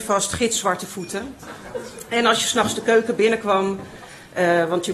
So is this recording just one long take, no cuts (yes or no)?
yes